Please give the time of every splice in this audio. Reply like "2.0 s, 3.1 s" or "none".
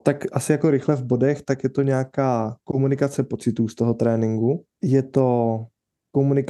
4.7 s